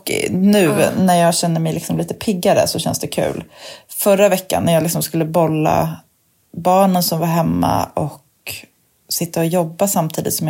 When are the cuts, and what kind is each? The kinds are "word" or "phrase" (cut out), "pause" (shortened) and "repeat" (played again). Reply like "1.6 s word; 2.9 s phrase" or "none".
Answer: none